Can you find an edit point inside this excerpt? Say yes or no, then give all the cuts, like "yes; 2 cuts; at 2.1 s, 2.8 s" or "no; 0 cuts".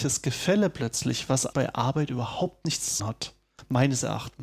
yes; 2 cuts; at 1.5 s, 3.0 s